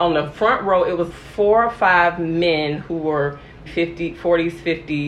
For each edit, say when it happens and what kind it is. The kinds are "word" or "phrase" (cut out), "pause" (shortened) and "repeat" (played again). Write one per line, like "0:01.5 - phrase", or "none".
0:01.1 - word
0:03.7 - word